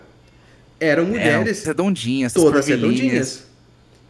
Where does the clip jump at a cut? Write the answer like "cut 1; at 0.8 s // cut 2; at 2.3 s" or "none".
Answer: cut 1; at 1.6 s // cut 2; at 2.4 s